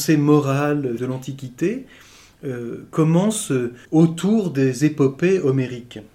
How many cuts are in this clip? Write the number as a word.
two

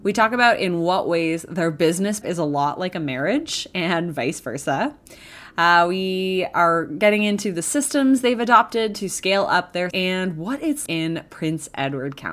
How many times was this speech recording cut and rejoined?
three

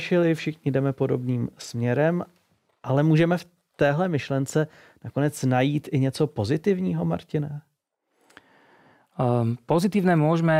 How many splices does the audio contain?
zero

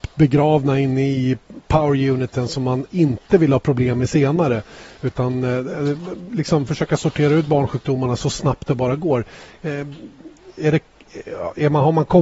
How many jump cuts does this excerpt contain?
zero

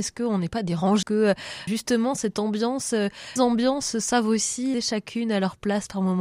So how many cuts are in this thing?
four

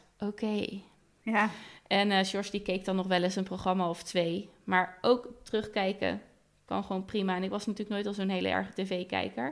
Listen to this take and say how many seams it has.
zero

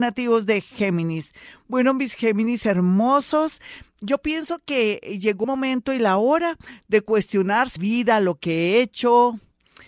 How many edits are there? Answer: two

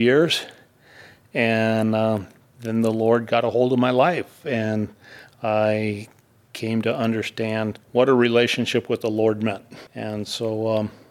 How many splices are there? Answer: two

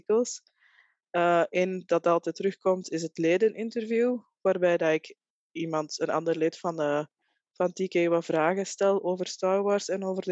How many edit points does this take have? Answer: zero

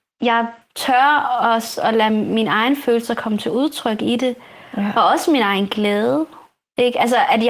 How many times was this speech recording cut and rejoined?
zero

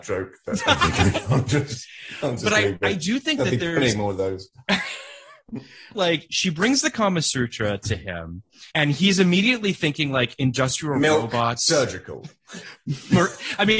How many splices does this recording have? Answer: two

